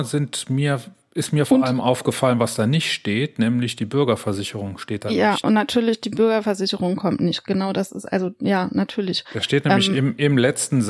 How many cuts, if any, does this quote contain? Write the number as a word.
zero